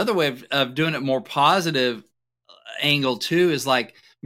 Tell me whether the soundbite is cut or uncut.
uncut